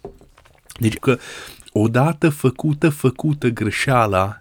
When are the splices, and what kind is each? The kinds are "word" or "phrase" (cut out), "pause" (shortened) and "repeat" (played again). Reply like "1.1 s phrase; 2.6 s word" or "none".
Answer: 1.0 s phrase; 2.8 s repeat